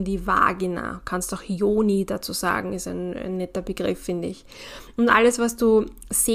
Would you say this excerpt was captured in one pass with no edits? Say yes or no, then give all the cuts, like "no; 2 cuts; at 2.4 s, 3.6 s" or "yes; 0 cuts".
yes; 0 cuts